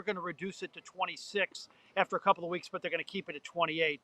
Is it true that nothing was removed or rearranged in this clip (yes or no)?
yes